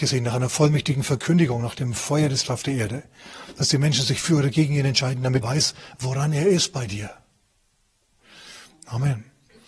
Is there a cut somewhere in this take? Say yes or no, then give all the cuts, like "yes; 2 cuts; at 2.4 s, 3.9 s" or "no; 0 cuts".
yes; 2 cuts; at 2.4 s, 5.4 s